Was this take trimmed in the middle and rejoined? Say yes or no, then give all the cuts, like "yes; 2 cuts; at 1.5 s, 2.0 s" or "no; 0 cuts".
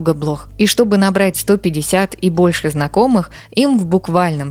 no; 0 cuts